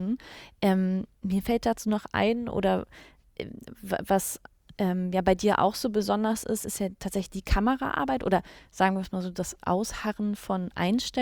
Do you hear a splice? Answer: yes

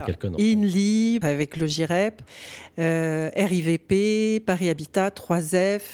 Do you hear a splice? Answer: yes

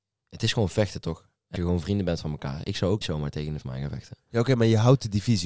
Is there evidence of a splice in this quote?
yes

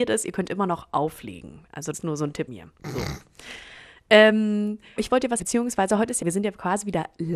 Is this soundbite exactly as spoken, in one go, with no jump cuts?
no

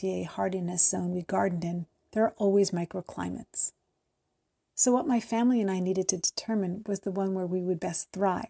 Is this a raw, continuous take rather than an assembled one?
yes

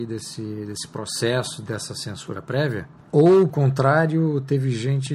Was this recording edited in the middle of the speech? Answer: yes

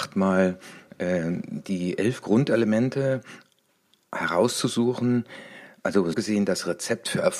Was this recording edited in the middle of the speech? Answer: yes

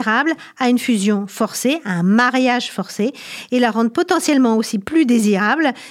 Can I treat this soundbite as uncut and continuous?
yes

